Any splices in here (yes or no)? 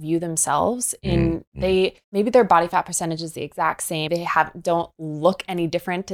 yes